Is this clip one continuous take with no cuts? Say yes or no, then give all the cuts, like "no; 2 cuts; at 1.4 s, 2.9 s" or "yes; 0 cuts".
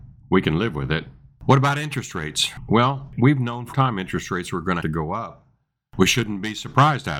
no; 2 cuts; at 3.7 s, 4.8 s